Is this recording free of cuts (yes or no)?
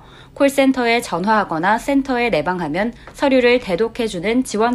yes